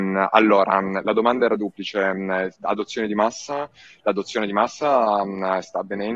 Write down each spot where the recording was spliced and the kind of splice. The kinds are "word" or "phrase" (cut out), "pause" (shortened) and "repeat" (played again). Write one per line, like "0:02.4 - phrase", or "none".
none